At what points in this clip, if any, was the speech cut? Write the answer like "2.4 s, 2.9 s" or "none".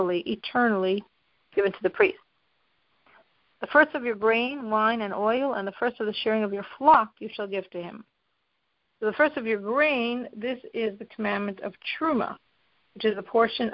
none